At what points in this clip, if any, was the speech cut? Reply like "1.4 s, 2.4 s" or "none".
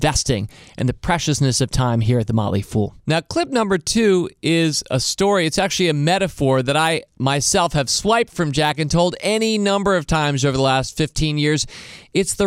3.0 s